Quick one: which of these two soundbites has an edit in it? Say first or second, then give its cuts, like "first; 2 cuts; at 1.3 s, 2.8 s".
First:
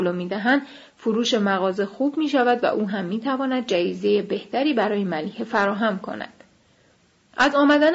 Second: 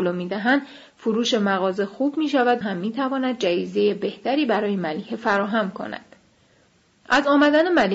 second; 1 cut; at 2.6 s